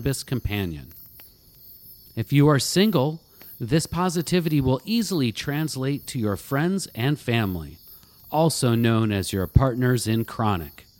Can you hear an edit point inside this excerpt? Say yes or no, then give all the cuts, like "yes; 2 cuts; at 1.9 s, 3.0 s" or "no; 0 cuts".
no; 0 cuts